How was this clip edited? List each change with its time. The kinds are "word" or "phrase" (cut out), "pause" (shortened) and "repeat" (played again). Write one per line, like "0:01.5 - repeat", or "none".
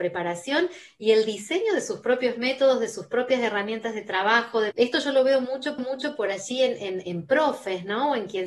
0:04.7 - phrase
0:05.8 - repeat